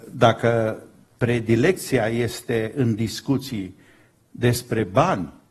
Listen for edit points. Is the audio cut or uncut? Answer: uncut